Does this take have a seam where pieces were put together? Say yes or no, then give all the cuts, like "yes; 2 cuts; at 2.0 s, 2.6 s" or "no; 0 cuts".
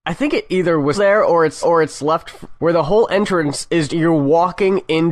yes; 4 cuts; at 0.9 s, 1.6 s, 2.6 s, 3.9 s